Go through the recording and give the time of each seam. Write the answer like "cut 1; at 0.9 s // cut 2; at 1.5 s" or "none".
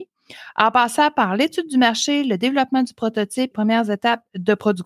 cut 1; at 3.5 s